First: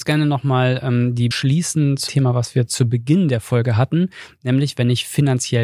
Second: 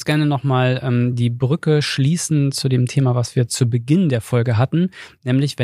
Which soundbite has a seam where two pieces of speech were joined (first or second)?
first